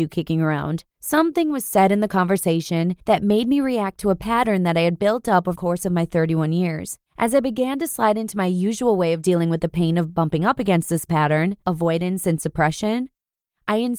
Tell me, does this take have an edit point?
yes; 5 cuts; at 0.9 s, 3.0 s, 5.6 s, 7.1 s, 11.6 s

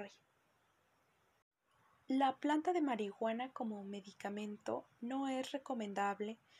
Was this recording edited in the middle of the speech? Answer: no; 0 cuts

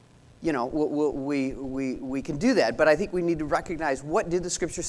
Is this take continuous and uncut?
yes; 0 cuts

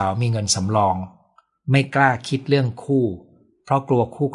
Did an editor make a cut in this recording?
no; 0 cuts

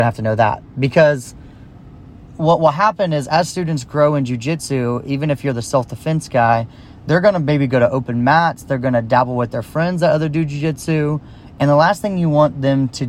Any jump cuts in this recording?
no; 0 cuts

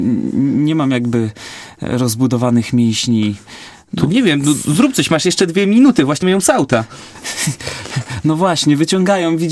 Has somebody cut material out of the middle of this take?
yes; 1 cut; at 6.2 s

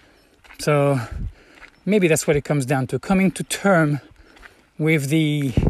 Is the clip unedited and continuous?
yes; 0 cuts

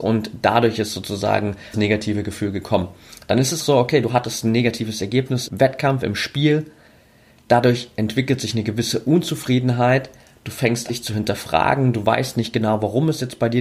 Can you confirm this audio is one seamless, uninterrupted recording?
no; 4 cuts; at 1.7 s, 3.6 s, 5.5 s, 10.9 s

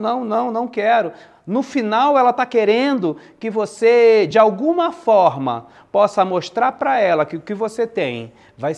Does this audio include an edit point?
no; 0 cuts

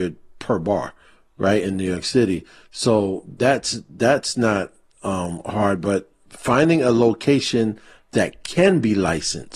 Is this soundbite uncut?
yes; 0 cuts

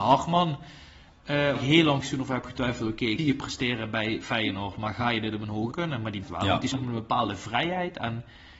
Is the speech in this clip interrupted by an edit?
yes; 6 cuts; at 1.5 s, 2.0 s, 3.2 s, 5.7 s, 6.2 s, 6.7 s

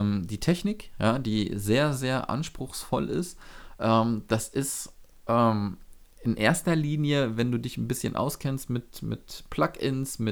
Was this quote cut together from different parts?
no; 0 cuts

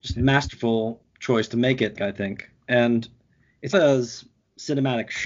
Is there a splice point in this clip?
yes; 3 cuts; at 1.1 s, 2.0 s, 3.7 s

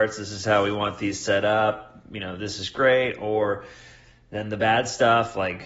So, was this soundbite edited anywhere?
no; 0 cuts

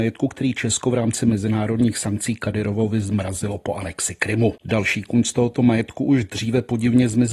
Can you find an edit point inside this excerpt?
yes; 1 cut; at 4.6 s

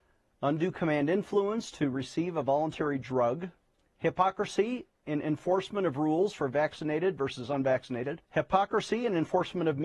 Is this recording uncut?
no; 2 cuts; at 3.8 s, 8.2 s

